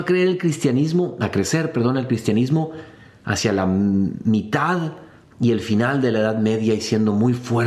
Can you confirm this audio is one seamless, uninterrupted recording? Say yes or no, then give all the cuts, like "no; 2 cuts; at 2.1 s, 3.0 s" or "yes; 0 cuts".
yes; 0 cuts